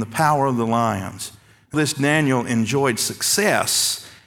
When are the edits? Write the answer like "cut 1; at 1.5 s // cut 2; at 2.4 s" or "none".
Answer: cut 1; at 1.7 s